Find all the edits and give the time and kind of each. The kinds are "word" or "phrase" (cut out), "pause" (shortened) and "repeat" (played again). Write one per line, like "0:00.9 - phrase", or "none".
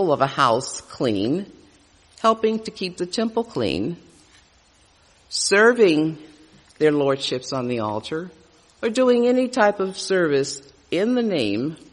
none